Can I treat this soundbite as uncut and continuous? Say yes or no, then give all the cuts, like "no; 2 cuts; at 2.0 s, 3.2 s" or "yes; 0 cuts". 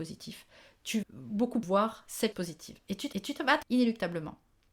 no; 5 cuts; at 1.0 s, 1.6 s, 2.3 s, 3.1 s, 3.6 s